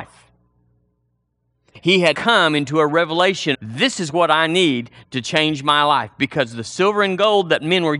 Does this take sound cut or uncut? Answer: cut